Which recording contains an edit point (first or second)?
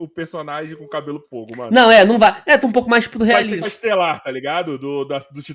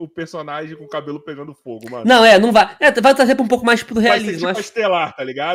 first